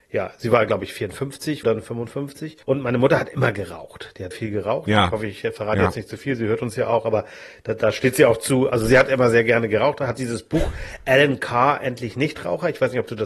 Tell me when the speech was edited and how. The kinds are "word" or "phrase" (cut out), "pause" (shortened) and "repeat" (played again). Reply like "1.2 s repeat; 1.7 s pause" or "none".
1.6 s word; 2.6 s pause; 4.3 s word